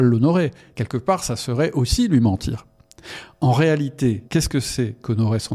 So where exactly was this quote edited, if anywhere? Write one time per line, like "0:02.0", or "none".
0:04.3